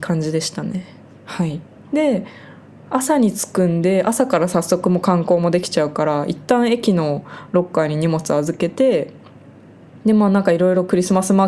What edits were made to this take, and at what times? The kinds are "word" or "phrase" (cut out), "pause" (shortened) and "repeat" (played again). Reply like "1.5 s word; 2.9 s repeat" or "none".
1.8 s pause; 10.0 s pause